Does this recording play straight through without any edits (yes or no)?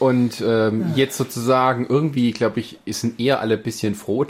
yes